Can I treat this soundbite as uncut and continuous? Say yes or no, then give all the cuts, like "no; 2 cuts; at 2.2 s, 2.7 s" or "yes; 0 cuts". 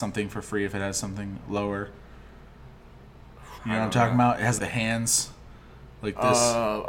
no; 2 cuts; at 3.6 s, 4.6 s